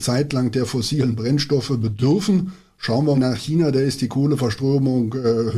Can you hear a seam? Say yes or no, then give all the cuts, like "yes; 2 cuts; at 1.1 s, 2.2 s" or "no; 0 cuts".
yes; 1 cut; at 3.1 s